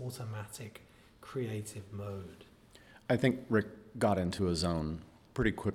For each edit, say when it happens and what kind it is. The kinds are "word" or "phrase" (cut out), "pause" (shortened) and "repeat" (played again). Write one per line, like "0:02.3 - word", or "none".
none